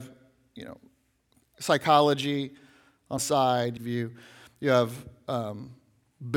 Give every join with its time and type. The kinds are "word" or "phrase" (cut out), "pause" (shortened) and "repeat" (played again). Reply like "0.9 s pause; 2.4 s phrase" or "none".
3.2 s word; 3.8 s phrase

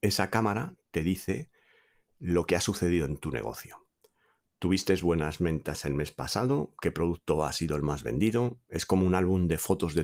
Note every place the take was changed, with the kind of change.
none

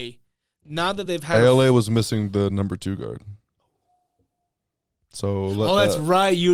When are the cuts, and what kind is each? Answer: none

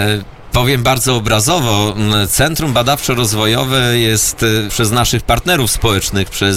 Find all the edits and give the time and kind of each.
4.7 s phrase

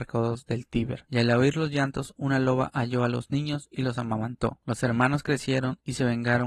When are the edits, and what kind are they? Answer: none

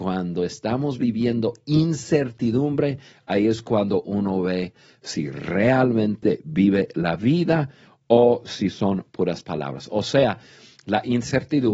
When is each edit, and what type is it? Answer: none

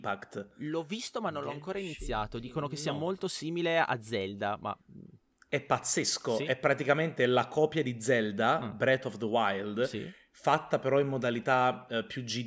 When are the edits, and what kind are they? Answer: none

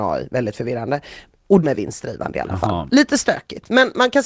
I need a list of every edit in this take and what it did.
1.6 s word

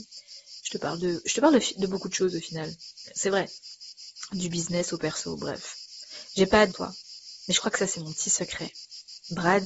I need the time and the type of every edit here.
6.7 s phrase

